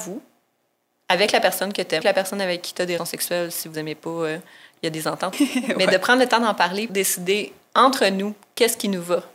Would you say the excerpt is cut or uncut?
cut